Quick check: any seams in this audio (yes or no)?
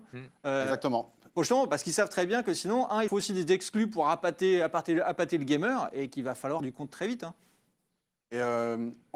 yes